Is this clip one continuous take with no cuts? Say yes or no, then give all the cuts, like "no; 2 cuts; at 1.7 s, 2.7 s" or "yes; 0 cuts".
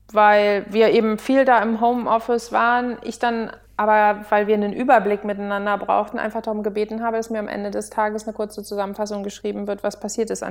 yes; 0 cuts